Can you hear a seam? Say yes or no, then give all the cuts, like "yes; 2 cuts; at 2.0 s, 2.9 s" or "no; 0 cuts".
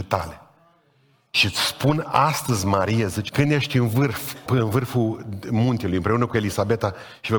yes; 2 cuts; at 3.3 s, 4.5 s